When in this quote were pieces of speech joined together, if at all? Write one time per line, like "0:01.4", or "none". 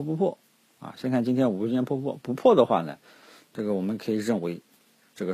none